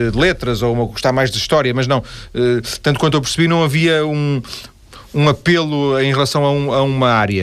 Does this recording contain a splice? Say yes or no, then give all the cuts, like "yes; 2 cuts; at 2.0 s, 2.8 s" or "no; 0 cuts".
no; 0 cuts